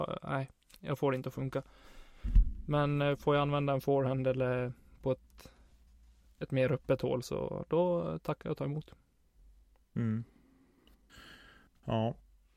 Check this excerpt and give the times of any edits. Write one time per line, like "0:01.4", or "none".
none